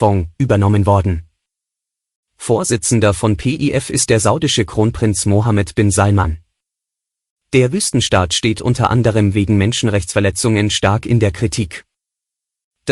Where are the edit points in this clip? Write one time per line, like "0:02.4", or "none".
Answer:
none